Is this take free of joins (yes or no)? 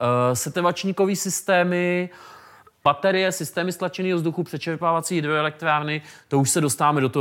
yes